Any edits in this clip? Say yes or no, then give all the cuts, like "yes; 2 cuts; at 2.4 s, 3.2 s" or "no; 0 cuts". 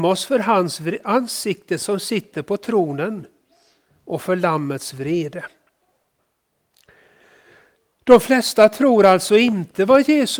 no; 0 cuts